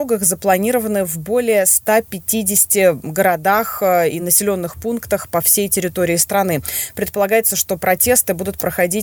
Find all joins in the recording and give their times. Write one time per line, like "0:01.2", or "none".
none